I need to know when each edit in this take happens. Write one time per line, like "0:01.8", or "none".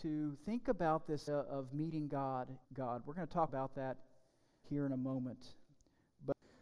0:01.3
0:02.6
0:03.5
0:04.6